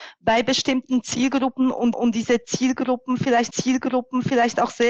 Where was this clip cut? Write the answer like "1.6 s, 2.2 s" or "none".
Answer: 1.9 s, 3.5 s